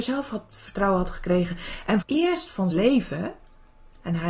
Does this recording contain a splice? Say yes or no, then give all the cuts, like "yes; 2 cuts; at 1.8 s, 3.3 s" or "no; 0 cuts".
yes; 2 cuts; at 2.0 s, 2.7 s